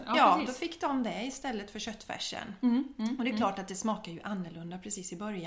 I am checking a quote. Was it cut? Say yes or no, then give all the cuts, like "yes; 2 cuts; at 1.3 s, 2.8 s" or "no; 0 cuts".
no; 0 cuts